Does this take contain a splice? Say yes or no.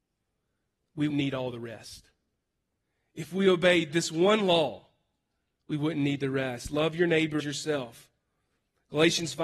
yes